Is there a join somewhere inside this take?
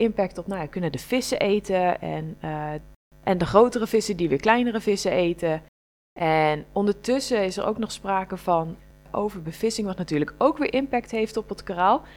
no; 0 cuts

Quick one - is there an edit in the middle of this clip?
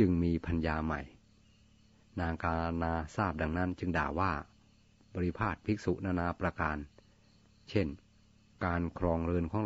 no; 0 cuts

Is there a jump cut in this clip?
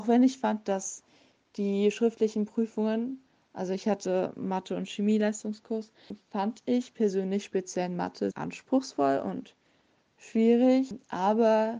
yes; 1 cut; at 8.3 s

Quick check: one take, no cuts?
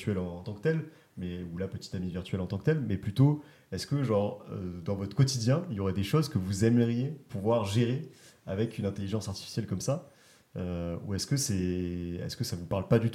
yes; 0 cuts

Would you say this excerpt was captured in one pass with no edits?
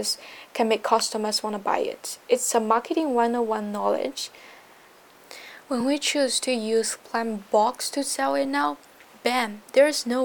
yes; 0 cuts

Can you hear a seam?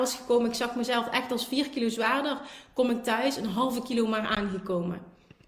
no; 0 cuts

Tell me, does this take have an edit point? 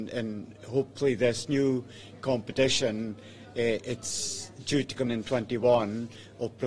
yes; 1 cut; at 5.1 s

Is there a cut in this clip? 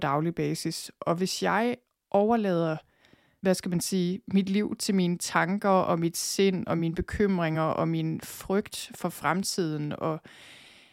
no; 0 cuts

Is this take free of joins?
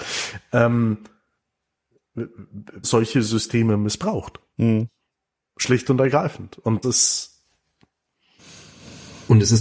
no; 2 cuts; at 2.8 s, 6.8 s

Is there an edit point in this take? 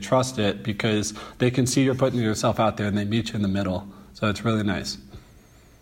no; 0 cuts

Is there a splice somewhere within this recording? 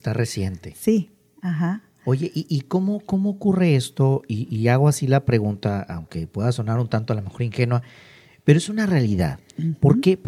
no; 0 cuts

